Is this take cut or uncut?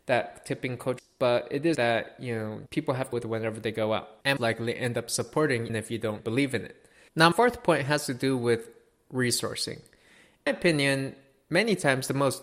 cut